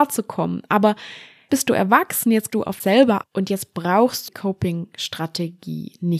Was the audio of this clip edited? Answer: yes; 5 cuts; at 1.5 s, 2.5 s, 2.8 s, 3.2 s, 4.3 s

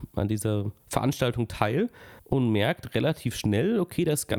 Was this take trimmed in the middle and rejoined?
yes; 1 cut; at 2.2 s

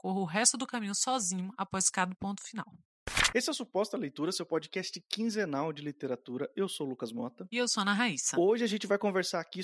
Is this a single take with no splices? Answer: yes; 0 cuts

